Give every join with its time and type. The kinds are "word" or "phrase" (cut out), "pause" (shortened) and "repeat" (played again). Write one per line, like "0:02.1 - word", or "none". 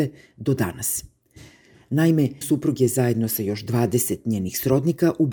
0:02.4 - word